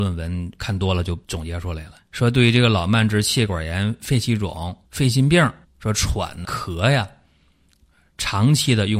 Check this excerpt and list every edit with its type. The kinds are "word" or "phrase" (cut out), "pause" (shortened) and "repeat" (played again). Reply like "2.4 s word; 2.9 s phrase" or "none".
1.2 s pause; 2.0 s pause; 4.8 s pause; 5.6 s pause; 6.4 s word